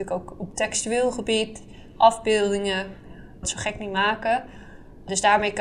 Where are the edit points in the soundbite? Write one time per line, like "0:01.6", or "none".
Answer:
0:03.4